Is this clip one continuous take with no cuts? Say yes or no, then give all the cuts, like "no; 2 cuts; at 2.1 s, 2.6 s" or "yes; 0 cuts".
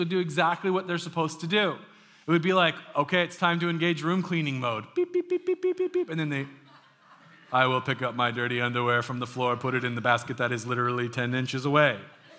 yes; 0 cuts